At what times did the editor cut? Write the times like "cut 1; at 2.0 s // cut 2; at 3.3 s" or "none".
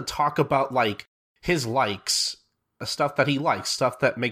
none